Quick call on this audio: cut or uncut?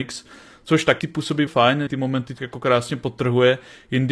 cut